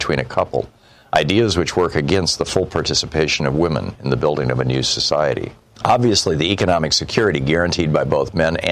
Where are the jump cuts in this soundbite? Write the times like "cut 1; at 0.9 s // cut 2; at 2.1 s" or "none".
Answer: none